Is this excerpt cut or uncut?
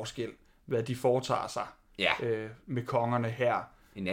uncut